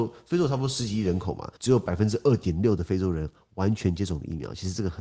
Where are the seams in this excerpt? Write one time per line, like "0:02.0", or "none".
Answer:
0:01.6